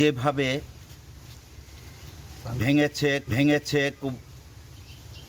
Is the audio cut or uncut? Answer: cut